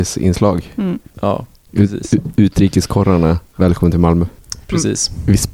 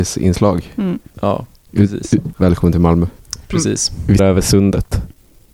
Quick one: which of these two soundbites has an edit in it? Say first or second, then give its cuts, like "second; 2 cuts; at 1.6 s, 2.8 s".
second; 2 cuts; at 2.3 s, 4.2 s